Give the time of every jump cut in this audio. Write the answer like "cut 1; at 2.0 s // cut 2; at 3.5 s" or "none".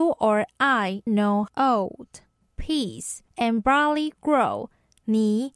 cut 1; at 1.1 s // cut 2; at 1.5 s // cut 3; at 3.3 s